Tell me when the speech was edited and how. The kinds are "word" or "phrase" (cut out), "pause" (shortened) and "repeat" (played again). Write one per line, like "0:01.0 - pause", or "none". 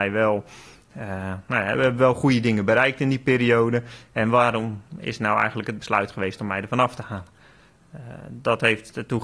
none